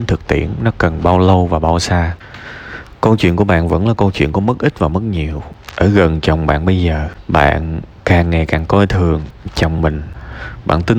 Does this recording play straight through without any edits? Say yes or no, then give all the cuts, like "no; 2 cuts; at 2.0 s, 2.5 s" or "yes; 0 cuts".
yes; 0 cuts